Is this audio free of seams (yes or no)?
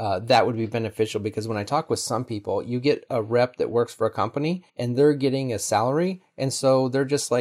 no